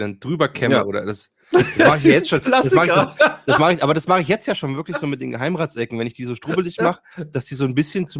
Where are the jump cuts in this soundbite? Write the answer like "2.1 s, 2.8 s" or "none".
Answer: none